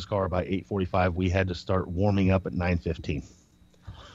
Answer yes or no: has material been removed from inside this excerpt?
no